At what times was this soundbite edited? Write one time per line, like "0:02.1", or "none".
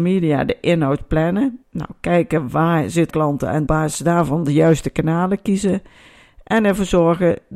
0:01.6
0:03.1
0:03.7